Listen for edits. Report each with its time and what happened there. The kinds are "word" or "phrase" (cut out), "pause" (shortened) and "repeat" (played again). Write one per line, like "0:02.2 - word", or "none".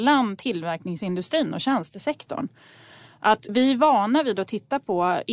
0:03.5 - word